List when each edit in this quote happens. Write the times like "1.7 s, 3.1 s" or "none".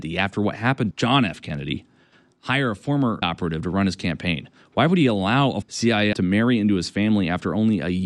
0.9 s, 3.2 s, 5.6 s, 6.1 s